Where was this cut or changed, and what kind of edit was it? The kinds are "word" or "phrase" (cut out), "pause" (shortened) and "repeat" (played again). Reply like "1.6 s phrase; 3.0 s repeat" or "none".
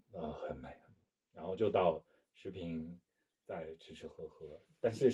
none